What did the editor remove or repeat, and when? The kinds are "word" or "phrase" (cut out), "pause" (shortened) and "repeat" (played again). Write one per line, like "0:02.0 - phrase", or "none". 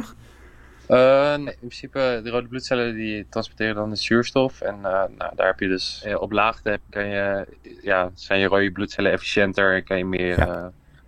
0:01.5 - word
0:06.8 - pause